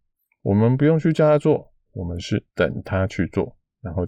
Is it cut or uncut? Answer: cut